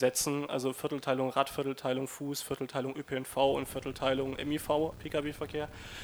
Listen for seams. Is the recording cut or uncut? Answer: cut